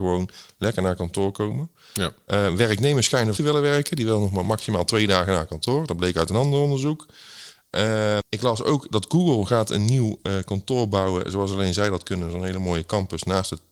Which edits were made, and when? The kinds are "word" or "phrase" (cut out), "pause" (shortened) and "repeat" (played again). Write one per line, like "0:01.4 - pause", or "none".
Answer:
0:03.4 - phrase
0:08.2 - word